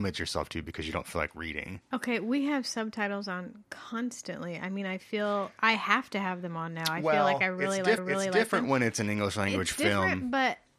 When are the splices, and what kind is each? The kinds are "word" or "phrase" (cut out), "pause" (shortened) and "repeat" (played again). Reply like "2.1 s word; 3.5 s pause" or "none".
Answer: 8.0 s repeat